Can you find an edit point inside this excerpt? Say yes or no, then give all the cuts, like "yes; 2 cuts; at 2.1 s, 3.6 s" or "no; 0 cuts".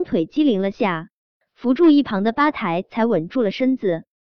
no; 0 cuts